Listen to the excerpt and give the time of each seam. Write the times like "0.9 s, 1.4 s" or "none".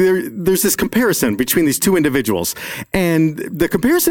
none